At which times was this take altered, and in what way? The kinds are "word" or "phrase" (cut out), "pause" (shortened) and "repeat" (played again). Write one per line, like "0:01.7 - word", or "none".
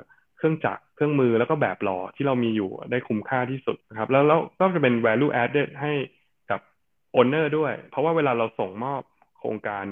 0:03.8 - pause